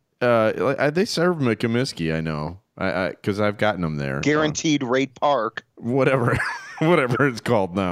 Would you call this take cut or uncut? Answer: cut